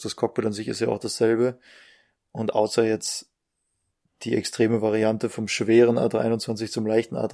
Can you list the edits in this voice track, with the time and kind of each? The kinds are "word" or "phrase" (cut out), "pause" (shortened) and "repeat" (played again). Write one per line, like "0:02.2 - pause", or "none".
none